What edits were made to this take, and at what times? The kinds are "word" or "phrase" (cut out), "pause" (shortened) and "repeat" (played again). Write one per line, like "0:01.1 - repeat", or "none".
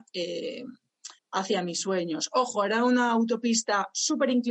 0:01.2 - pause